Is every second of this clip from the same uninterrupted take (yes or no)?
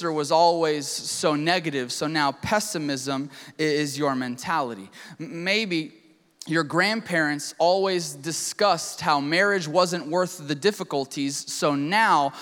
yes